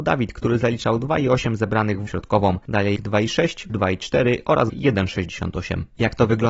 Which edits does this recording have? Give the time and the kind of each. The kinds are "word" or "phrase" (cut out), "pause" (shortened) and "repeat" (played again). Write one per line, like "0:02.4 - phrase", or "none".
0:02.1 - phrase
0:03.0 - word
0:03.7 - word
0:04.7 - word